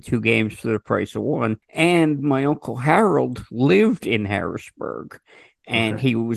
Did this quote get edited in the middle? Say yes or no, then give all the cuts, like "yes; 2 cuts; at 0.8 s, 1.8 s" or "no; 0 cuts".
yes; 1 cut; at 1.6 s